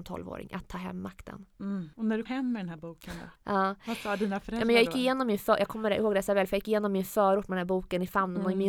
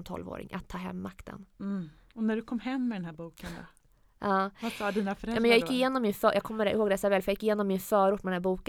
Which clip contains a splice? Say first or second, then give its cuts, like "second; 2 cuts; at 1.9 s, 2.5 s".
first; 3 cuts; at 1.9 s, 2.3 s, 3.4 s